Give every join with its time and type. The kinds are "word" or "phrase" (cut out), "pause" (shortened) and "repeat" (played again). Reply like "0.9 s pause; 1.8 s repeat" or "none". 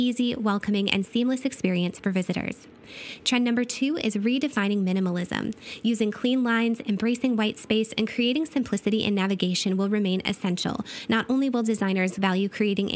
none